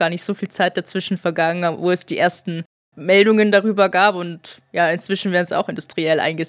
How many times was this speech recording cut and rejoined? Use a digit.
1